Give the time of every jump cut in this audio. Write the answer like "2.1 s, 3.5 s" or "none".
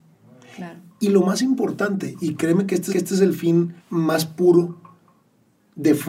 2.2 s, 2.9 s, 3.8 s